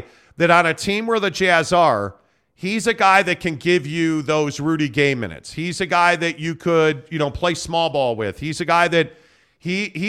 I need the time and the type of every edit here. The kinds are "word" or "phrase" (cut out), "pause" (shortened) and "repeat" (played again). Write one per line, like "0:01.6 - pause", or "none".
none